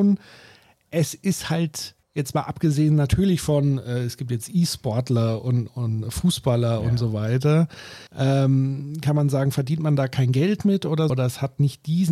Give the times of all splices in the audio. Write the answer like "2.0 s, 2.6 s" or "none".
2.0 s, 8.1 s, 11.1 s